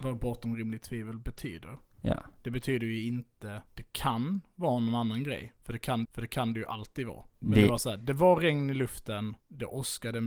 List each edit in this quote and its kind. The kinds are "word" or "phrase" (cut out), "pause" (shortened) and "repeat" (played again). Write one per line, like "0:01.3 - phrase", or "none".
0:03.7 - pause
0:06.0 - repeat
0:07.3 - pause